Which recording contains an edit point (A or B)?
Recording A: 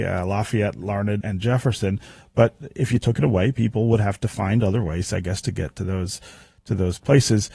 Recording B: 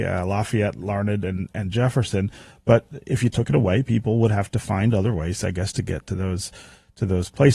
A